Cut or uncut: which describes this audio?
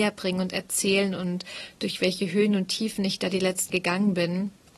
cut